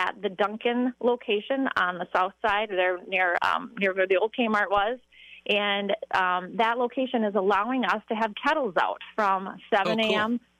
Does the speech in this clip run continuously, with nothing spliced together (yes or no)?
no